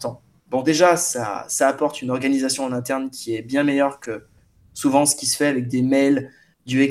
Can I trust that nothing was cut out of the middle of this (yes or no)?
yes